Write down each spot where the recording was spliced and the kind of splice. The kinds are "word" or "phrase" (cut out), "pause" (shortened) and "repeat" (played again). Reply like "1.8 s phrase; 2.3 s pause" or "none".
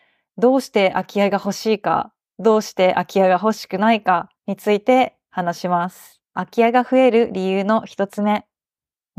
4.4 s pause